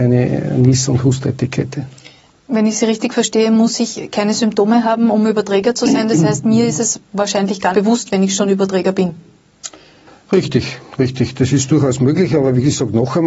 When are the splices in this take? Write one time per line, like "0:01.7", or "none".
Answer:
0:07.7